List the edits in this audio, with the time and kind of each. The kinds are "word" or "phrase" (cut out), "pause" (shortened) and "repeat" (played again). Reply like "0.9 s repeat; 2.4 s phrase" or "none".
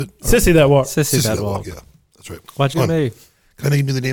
2.7 s word